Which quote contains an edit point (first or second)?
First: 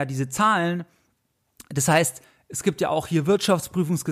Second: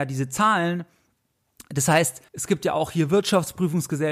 second